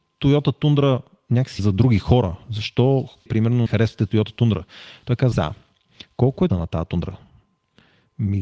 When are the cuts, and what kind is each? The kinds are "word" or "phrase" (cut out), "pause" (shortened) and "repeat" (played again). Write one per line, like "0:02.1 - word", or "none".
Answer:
0:01.6 - word
0:03.3 - word
0:03.7 - word
0:05.3 - word
0:06.5 - word